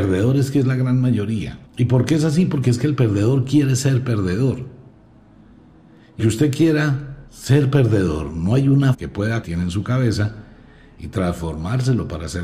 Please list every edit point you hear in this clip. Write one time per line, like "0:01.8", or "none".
0:01.7
0:06.2
0:07.3
0:08.9
0:09.4

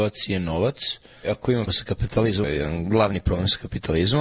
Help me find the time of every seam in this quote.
0:01.2
0:01.7
0:02.4

